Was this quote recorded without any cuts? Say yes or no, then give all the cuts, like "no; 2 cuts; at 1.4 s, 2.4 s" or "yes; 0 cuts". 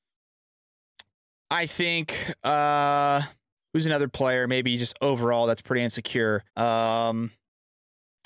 no; 2 cuts; at 1.1 s, 6.5 s